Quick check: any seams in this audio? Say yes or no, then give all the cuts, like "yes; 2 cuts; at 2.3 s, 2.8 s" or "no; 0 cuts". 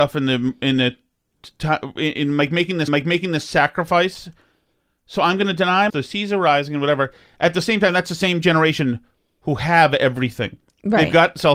yes; 2 cuts; at 2.9 s, 5.9 s